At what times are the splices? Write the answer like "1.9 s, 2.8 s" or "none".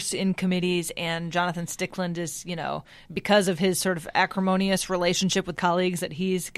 5.6 s